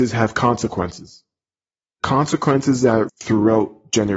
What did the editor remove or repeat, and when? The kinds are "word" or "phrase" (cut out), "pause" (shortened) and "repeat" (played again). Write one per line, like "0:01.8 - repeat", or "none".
0:03.1 - word